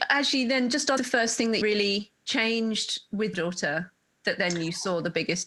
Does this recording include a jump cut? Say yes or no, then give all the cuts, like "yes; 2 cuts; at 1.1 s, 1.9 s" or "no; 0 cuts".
yes; 5 cuts; at 1.0 s, 1.6 s, 2.2 s, 3.3 s, 4.1 s